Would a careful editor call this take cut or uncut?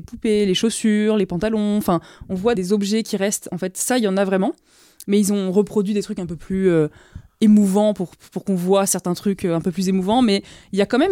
cut